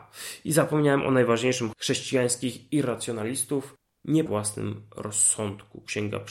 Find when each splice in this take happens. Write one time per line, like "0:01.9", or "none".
0:01.7
0:04.3